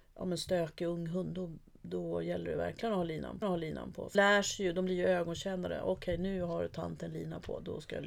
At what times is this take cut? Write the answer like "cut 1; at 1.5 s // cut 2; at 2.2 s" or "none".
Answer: cut 1; at 3.4 s // cut 2; at 4.1 s